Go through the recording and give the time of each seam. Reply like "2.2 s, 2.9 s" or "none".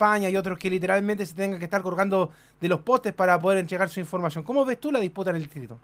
none